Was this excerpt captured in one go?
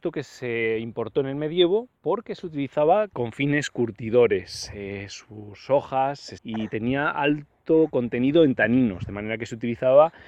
no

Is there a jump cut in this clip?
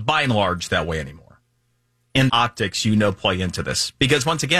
yes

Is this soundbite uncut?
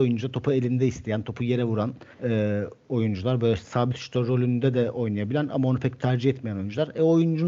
no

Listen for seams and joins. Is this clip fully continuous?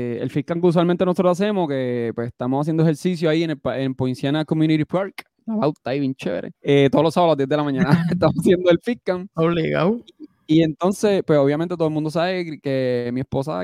no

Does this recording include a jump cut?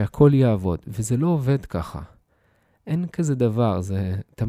no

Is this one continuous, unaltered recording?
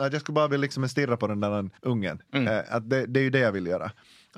no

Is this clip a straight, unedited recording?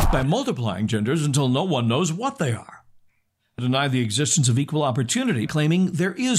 no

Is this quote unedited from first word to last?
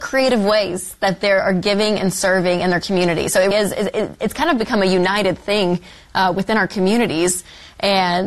no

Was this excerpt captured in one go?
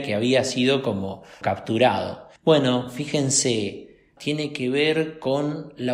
no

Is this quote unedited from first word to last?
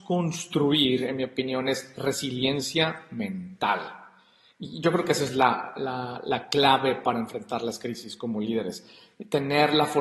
yes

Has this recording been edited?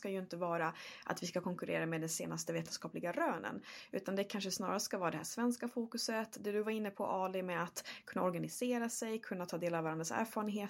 no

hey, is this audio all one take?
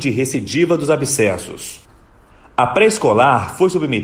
yes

